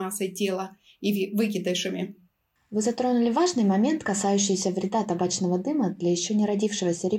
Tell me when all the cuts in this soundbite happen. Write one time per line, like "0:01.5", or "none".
none